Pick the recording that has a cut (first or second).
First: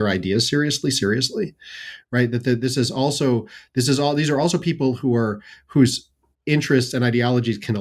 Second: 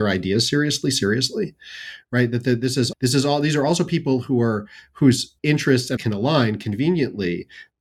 second